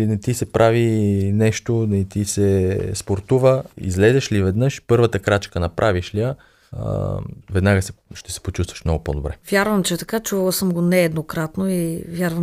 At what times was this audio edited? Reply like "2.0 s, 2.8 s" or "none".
3.7 s, 7.4 s, 9.4 s

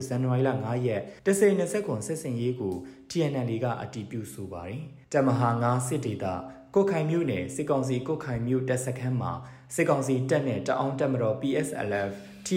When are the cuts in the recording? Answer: 1.2 s, 5.0 s

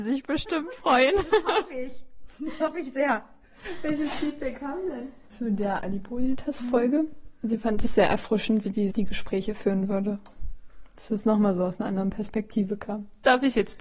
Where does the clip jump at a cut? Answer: 8.9 s

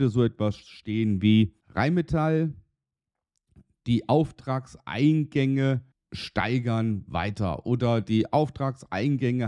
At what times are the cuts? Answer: 1.6 s, 5.9 s

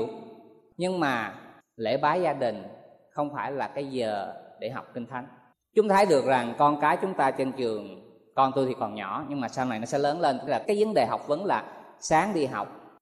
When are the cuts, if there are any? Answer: 10.5 s

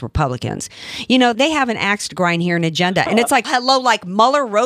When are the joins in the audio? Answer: 1.3 s, 3.4 s

